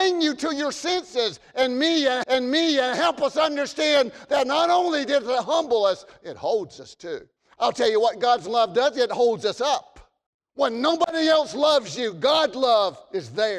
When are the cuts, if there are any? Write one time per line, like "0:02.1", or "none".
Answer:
0:02.2
0:07.4
0:10.3